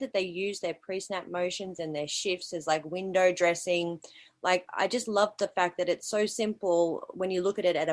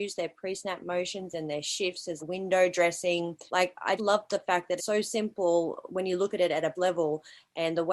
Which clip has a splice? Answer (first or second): second